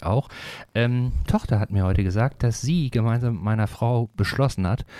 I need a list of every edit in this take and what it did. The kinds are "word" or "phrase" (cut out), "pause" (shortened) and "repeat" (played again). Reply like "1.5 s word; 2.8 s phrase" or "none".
1.3 s word